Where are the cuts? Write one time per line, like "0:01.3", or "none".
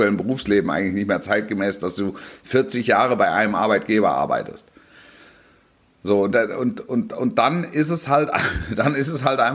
none